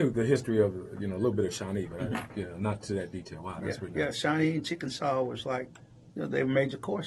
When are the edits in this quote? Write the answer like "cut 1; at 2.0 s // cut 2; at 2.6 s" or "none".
none